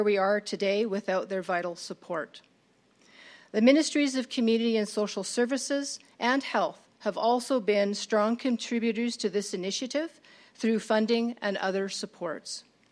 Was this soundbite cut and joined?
no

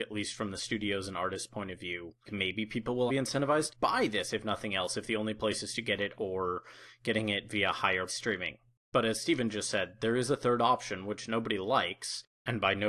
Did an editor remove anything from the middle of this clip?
yes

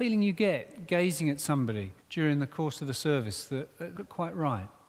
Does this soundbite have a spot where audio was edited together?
yes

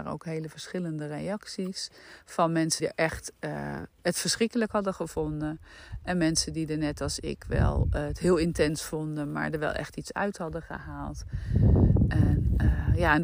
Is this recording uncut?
no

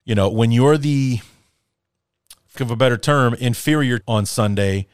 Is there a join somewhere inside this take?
yes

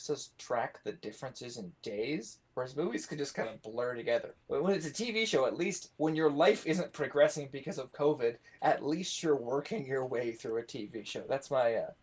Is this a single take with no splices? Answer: no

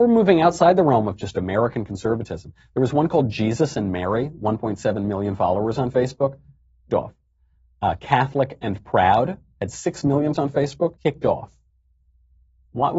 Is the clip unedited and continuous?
no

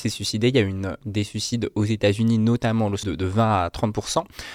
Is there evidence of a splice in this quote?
yes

